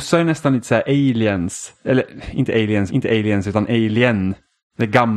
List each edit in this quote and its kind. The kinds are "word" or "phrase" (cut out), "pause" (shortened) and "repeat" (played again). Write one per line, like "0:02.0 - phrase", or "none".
0:02.9 - repeat